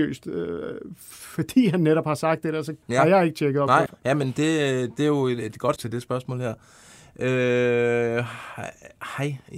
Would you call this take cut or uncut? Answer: cut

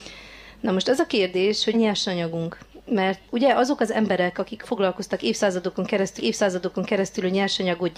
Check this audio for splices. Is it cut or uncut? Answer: cut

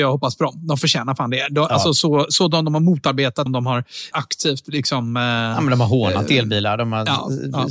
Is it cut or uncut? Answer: cut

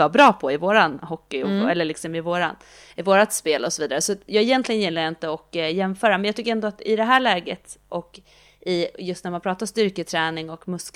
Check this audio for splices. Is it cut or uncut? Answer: uncut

